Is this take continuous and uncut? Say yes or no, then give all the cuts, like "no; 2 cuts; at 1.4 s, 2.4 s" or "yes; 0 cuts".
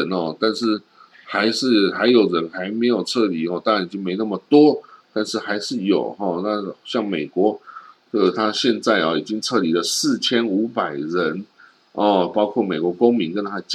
yes; 0 cuts